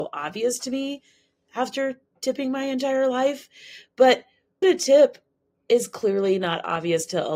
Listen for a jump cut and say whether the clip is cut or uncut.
cut